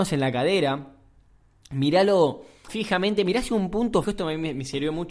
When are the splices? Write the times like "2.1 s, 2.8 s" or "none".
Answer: 2.7 s, 4.0 s

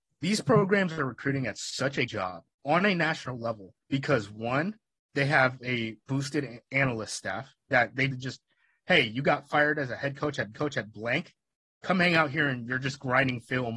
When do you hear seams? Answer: 2.1 s, 2.5 s, 3.8 s, 6.7 s, 8.1 s, 10.5 s

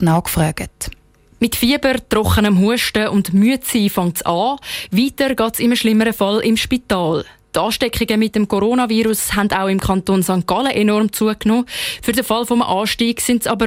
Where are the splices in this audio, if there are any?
none

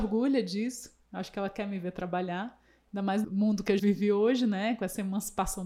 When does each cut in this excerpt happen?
3.2 s, 3.8 s

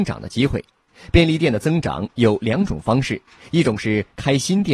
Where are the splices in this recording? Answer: none

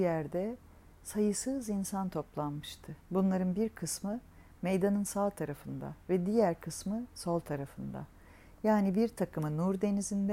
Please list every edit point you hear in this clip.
3.0 s

